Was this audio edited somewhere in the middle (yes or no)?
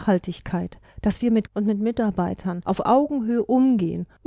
yes